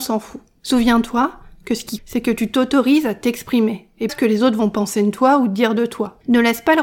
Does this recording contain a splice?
yes; 2 cuts; at 2.0 s, 4.1 s

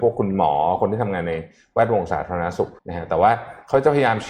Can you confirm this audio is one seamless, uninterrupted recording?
no; 1 cut; at 2.8 s

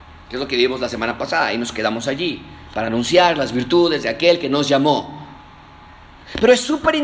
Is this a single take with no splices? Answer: no; 1 cut; at 2.7 s

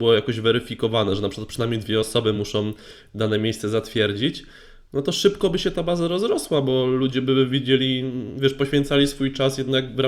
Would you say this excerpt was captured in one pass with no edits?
yes; 0 cuts

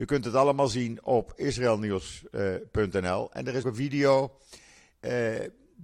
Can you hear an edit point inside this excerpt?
yes; 1 cut; at 3.6 s

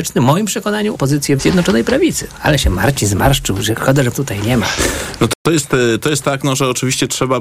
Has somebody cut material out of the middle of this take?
yes; 3 cuts; at 0.9 s, 1.4 s, 4.1 s

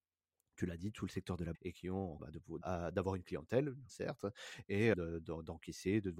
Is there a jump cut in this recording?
yes; 5 cuts; at 1.5 s, 2.2 s, 2.6 s, 3.9 s, 4.9 s

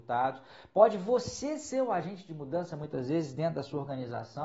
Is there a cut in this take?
no; 0 cuts

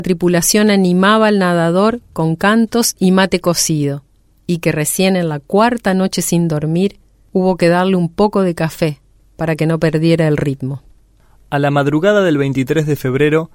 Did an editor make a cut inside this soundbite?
no; 0 cuts

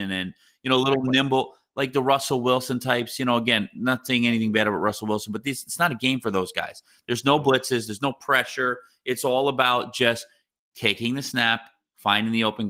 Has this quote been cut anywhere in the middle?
no; 0 cuts

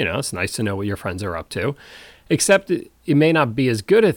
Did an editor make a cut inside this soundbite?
no; 0 cuts

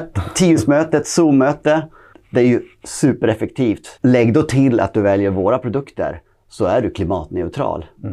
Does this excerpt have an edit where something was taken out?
yes; 2 cuts; at 2.1 s, 4.0 s

